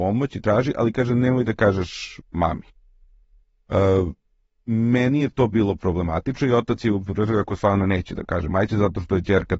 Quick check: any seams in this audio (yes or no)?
no